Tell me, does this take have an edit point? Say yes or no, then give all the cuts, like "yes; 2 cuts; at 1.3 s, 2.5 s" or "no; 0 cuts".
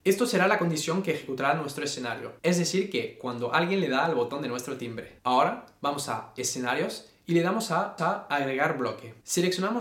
yes; 1 cut; at 8.0 s